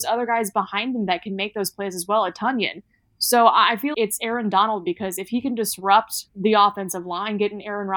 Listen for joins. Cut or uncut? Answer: cut